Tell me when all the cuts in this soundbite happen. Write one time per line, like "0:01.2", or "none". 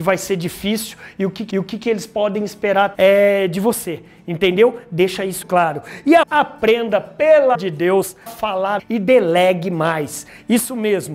0:01.5
0:02.9
0:05.4
0:06.2
0:07.5
0:08.3
0:08.8